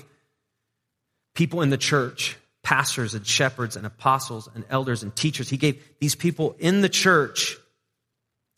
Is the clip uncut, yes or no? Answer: yes